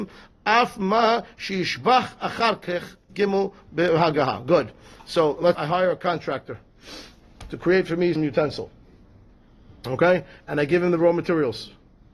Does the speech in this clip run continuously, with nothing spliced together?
no; 3 cuts; at 3.1 s, 5.5 s, 8.2 s

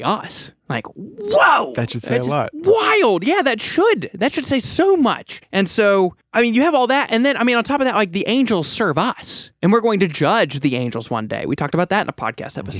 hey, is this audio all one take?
no; 1 cut; at 5.4 s

